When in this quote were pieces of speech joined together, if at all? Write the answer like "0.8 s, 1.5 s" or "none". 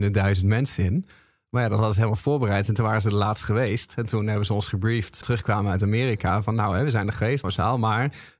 5.2 s, 7.4 s